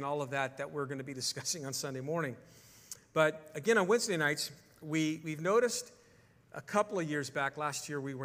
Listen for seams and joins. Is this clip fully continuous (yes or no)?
yes